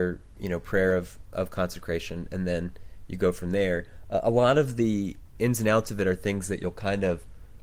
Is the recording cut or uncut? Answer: uncut